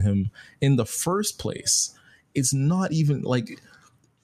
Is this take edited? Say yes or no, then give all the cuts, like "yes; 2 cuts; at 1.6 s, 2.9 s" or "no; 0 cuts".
no; 0 cuts